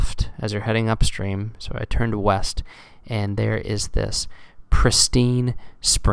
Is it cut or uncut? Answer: uncut